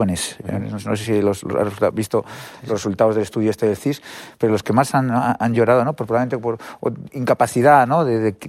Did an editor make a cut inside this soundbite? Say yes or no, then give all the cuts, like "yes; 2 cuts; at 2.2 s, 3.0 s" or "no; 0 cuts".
no; 0 cuts